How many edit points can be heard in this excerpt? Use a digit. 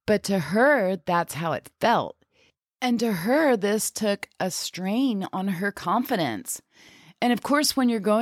0